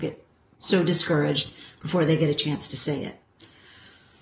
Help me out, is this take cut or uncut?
uncut